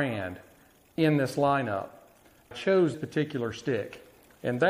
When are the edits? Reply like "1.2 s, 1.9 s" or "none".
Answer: 2.5 s, 2.9 s